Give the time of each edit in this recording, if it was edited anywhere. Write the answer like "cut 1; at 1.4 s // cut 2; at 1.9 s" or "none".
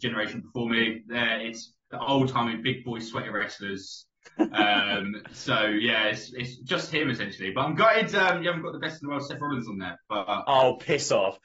cut 1; at 1.8 s